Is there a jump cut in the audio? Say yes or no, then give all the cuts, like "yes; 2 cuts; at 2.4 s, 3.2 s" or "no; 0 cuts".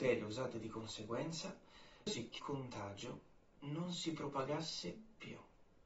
yes; 2 cuts; at 2.1 s, 2.4 s